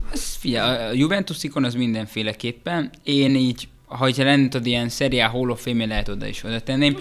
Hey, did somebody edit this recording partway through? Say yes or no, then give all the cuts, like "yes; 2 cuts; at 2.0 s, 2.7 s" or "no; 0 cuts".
no; 0 cuts